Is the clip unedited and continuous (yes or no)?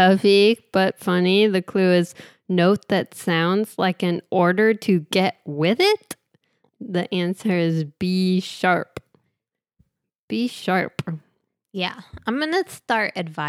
yes